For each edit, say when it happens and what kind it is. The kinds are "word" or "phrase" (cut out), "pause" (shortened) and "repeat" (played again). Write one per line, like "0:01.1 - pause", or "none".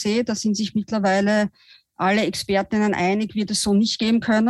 none